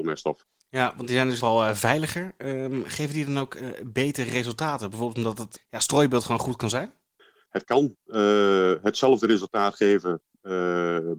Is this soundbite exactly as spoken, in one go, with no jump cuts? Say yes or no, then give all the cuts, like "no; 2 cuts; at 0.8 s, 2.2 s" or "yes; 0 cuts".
no; 3 cuts; at 1.4 s, 5.6 s, 7.2 s